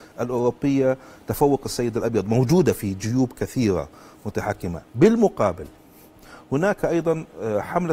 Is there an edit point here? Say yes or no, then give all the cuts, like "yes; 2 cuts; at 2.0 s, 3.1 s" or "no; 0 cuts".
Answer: no; 0 cuts